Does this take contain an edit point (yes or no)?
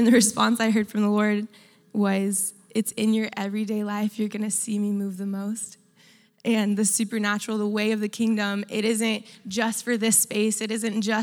no